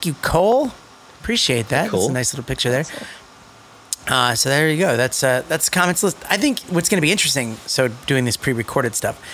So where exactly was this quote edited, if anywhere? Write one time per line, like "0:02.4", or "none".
0:01.1

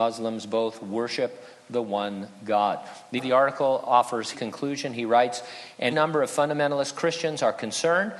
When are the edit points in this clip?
0:03.2
0:04.3
0:05.9

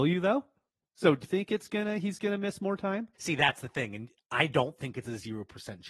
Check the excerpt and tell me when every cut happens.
0:01.2
0:03.1

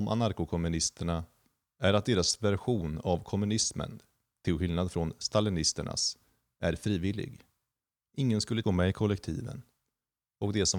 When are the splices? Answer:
0:08.6

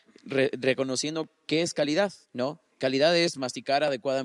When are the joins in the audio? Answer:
0:02.2

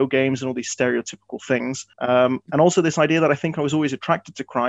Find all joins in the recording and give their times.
0:01.9

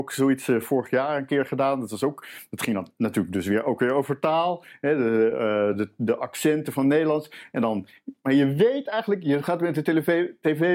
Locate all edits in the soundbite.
none

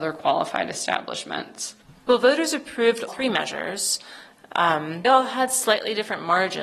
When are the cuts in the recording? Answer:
0:03.1
0:05.0

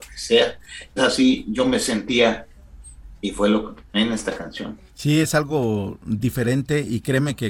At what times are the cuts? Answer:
0:01.0
0:03.9
0:04.9

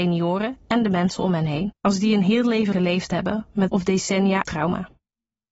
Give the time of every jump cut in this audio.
0:01.8
0:02.7
0:03.7
0:04.4

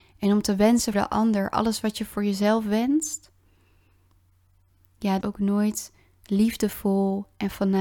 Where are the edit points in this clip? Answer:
0:00.9
0:05.2

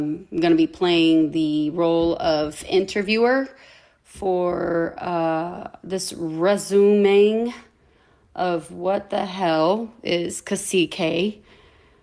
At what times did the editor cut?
none

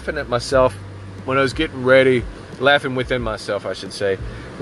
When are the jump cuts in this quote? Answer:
none

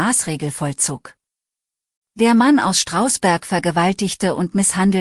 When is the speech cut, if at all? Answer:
none

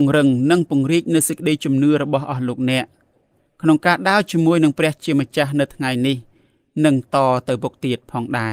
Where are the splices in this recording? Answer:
none

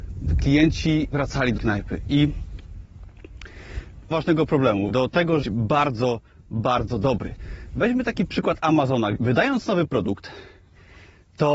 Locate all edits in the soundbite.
0:01.1
0:01.6
0:04.1
0:04.9
0:05.4
0:09.1

